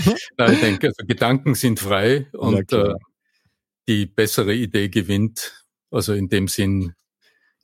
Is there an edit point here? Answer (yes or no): no